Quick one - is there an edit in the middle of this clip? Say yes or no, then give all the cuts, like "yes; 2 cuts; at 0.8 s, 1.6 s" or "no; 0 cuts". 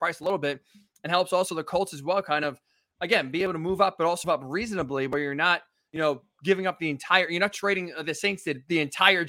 yes; 1 cut; at 4.2 s